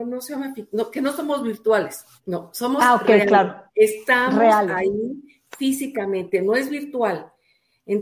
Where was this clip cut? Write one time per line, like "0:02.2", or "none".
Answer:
0:02.2
0:03.7